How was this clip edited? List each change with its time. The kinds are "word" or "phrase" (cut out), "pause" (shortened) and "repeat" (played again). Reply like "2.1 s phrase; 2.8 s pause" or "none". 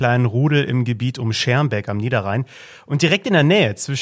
none